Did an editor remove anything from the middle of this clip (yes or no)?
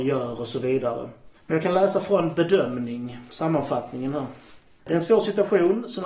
no